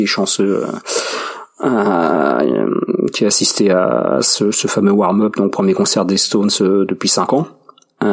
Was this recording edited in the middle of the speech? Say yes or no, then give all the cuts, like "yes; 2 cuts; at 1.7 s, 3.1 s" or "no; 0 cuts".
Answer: no; 0 cuts